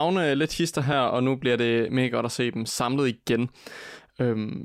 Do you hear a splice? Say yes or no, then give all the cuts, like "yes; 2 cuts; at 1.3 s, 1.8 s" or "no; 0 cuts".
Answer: no; 0 cuts